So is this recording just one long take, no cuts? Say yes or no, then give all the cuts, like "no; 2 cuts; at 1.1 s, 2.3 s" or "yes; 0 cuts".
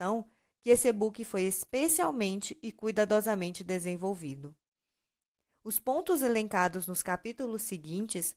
yes; 0 cuts